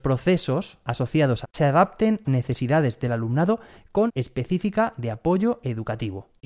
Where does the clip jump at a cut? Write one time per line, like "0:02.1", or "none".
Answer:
0:01.4
0:02.2
0:04.1